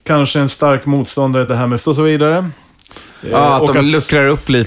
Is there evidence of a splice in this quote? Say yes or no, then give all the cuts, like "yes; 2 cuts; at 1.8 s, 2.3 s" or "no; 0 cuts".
yes; 3 cuts; at 1.5 s, 1.8 s, 3.3 s